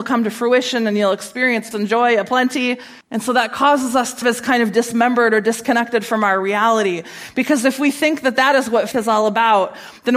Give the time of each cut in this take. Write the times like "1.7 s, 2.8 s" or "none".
1.7 s, 3.0 s, 4.2 s, 8.9 s